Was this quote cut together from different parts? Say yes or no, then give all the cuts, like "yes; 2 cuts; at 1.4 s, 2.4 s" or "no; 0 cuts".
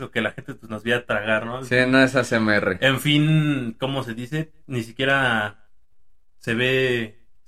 no; 0 cuts